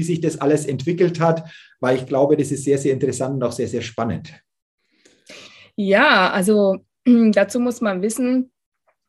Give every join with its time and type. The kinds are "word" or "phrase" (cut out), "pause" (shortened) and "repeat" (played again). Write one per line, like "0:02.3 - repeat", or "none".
none